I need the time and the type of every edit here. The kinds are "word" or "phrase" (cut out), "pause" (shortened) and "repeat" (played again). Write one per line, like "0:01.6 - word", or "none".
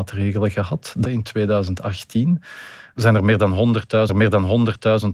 0:01.0 - word
0:04.1 - repeat

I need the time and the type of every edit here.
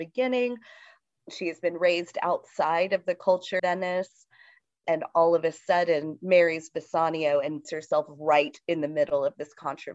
0:03.6 - word
0:04.8 - word
0:07.6 - word

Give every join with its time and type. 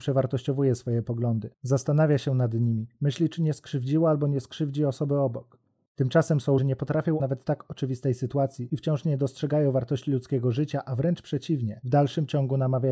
0:06.6 - phrase
0:07.2 - phrase

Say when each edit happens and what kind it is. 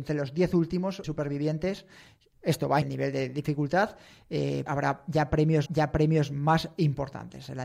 0:01.0 - word
0:02.8 - word
0:04.7 - word
0:05.7 - repeat

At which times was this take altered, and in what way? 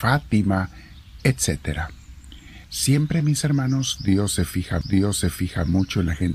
0:02.6 - pause
0:04.8 - repeat

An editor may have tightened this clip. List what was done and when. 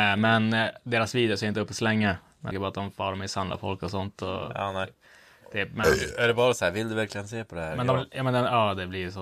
0:02.5 - word

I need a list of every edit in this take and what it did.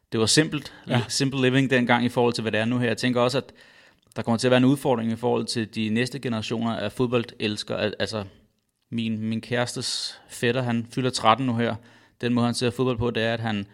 none

